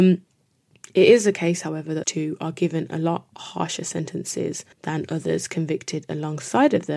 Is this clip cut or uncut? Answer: cut